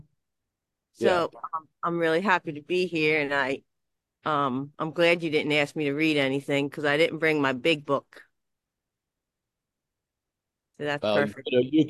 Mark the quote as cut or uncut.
uncut